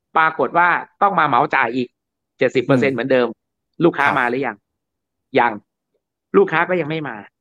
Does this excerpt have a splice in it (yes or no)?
no